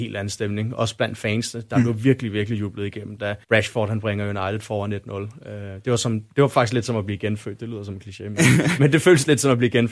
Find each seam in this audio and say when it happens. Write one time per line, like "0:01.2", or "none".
0:03.4